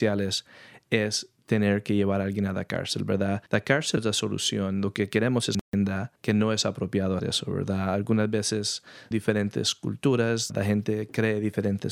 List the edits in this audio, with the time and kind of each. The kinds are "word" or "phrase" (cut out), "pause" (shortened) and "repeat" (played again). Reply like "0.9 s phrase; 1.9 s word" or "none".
3.5 s pause; 4.0 s word; 6.2 s pause; 7.2 s word; 9.1 s word; 10.5 s word